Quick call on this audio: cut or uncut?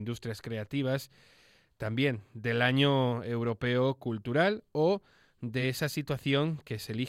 uncut